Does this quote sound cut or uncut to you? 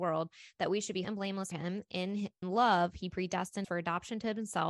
cut